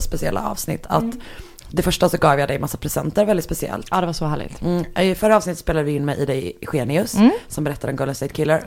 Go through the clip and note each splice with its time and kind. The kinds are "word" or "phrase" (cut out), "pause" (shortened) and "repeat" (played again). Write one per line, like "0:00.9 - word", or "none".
none